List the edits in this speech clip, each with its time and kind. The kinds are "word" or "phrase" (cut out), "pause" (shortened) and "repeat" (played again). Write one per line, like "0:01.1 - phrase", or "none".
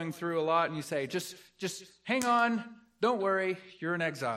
none